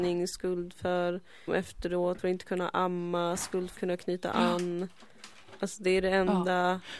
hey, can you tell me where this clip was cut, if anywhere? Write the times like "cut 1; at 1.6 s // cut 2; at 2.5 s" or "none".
cut 1; at 1.5 s // cut 2; at 2.2 s // cut 3; at 3.8 s